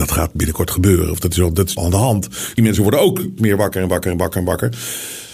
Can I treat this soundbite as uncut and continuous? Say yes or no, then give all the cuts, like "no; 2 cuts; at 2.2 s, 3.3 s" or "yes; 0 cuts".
no; 3 cuts; at 1.8 s, 2.6 s, 3.4 s